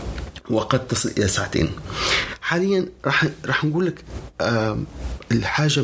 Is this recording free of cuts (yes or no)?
yes